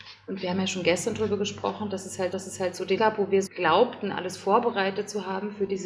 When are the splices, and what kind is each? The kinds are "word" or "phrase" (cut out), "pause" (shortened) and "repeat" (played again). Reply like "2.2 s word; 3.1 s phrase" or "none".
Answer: 2.3 s repeat; 3.0 s word; 3.5 s word